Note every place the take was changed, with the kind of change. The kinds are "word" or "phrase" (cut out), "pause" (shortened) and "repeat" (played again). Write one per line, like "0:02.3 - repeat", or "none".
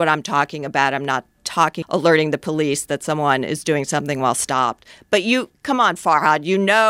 0:01.8 - word